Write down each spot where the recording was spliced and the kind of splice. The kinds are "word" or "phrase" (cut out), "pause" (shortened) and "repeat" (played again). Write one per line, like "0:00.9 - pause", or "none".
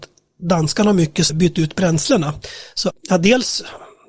0:01.3 - word
0:02.9 - word